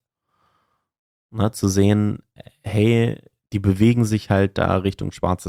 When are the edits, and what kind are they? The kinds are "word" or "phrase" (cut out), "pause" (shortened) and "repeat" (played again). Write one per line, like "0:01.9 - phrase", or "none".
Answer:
none

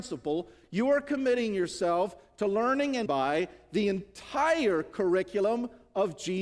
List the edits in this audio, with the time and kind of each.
0:03.1 - word

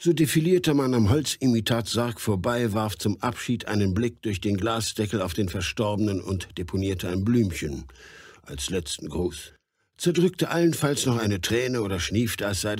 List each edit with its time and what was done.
none

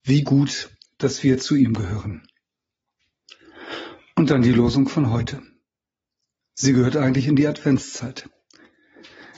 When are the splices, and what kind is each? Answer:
none

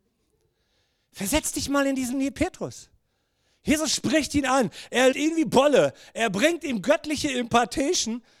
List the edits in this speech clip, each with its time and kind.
0:02.1 - word
0:05.1 - word

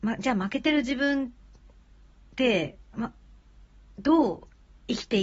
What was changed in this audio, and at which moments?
0:02.9 - word

